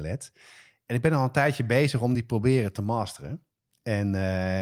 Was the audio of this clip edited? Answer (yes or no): no